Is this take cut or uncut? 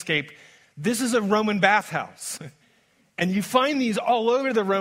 cut